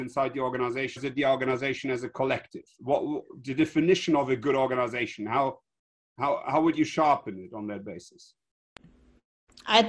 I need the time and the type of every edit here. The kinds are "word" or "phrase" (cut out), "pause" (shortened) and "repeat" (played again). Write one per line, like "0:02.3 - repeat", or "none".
0:01.0 - word